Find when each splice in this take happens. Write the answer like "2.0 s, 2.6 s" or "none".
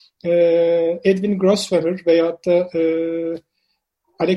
none